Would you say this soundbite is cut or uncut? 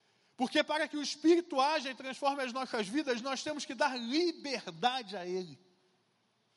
uncut